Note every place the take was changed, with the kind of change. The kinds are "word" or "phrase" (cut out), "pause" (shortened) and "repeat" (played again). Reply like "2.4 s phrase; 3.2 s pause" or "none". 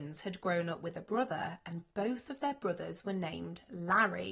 none